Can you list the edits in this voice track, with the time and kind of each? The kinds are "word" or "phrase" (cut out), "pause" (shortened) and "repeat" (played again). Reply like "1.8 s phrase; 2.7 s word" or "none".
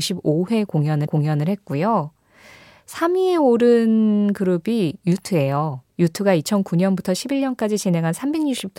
1.1 s repeat; 5.9 s pause